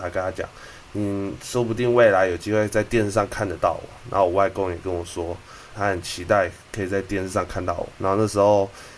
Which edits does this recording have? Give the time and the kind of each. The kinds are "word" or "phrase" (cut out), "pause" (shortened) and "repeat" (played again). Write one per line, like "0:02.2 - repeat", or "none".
0:05.7 - word
0:07.9 - pause